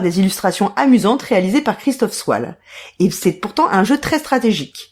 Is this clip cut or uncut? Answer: uncut